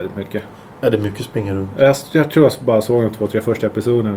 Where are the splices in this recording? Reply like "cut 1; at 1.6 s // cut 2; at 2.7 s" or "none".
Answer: none